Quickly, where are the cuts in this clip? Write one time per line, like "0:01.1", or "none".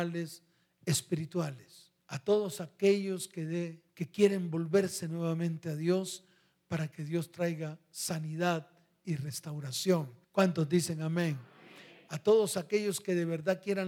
0:02.0
0:03.9
0:10.2